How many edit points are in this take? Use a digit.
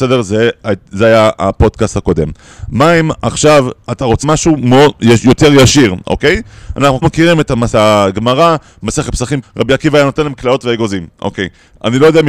5